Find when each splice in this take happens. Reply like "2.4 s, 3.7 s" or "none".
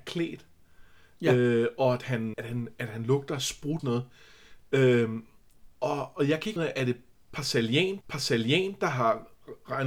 2.3 s, 3.8 s, 5.7 s, 6.6 s, 8.0 s